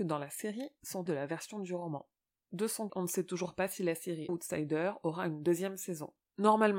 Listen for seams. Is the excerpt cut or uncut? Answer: cut